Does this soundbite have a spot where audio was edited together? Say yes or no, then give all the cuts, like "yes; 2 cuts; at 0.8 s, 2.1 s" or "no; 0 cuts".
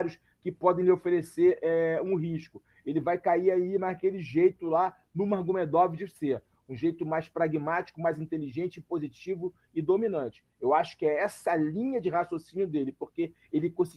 no; 0 cuts